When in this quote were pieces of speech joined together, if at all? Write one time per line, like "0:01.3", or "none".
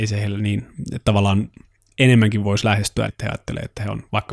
0:03.1